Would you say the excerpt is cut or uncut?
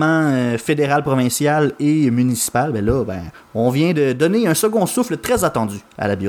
uncut